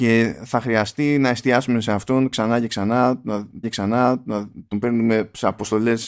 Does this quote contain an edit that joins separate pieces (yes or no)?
yes